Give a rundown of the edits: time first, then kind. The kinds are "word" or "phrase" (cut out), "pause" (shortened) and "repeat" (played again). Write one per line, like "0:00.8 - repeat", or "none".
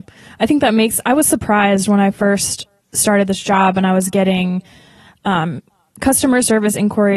none

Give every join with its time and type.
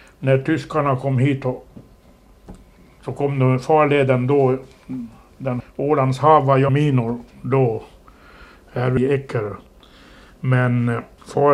0:05.6 - word
0:06.7 - phrase
0:07.3 - pause

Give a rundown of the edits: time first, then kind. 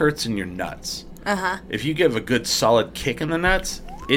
none

